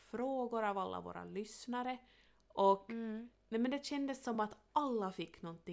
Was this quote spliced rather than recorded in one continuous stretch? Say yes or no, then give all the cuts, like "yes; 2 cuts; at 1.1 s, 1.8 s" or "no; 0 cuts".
no; 0 cuts